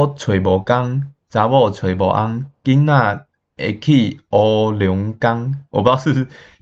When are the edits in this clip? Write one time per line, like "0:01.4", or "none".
none